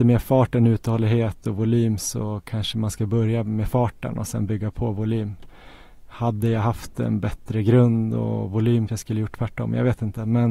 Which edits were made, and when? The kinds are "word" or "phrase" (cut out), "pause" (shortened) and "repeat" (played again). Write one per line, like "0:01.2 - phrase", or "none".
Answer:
0:08.9 - word